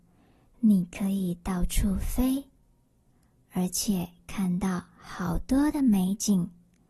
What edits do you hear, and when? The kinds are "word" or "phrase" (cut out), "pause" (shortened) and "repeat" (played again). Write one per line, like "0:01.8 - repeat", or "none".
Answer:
none